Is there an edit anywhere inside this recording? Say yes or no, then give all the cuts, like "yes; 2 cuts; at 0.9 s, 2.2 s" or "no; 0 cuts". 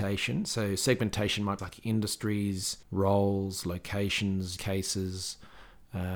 yes; 3 cuts; at 1.6 s, 2.8 s, 4.6 s